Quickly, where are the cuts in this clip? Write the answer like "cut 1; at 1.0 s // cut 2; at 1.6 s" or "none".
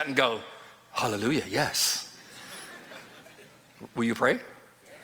none